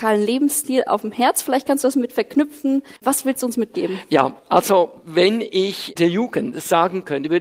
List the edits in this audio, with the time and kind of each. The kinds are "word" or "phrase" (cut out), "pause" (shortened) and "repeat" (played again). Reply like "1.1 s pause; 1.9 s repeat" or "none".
3.0 s pause

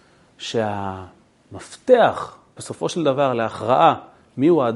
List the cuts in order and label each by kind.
2.6 s word

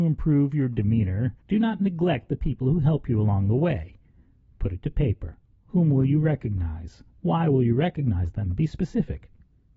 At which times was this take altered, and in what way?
1.4 s pause; 5.4 s pause; 7.1 s pause

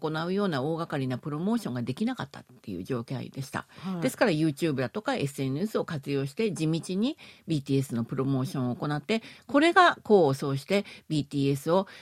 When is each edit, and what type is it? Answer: none

